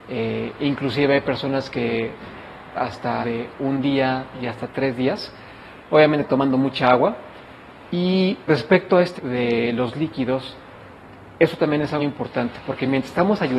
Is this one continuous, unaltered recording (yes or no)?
no